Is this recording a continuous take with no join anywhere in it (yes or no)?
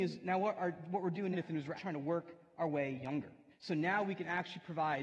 no